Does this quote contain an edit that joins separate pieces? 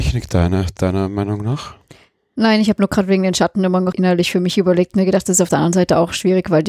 yes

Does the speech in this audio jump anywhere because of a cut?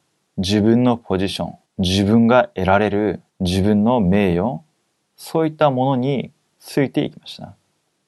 yes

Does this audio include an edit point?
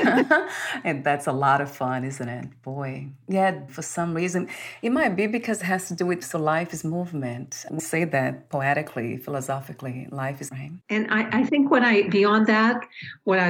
yes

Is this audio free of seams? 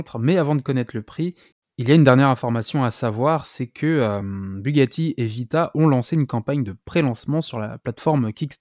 yes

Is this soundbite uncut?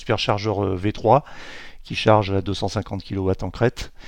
yes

